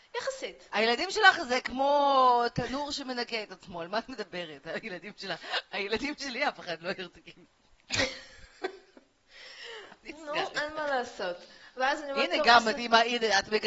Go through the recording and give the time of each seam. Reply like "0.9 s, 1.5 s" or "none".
none